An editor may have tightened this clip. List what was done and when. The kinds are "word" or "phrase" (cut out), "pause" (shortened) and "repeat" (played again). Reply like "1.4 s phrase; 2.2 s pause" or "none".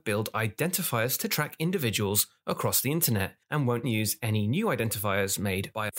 3.4 s pause; 3.8 s word